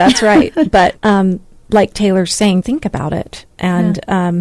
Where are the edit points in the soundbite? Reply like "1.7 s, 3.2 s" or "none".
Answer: 1.0 s, 2.6 s